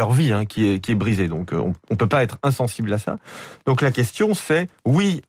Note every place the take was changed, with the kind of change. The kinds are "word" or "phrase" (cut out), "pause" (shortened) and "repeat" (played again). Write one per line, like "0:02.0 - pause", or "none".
none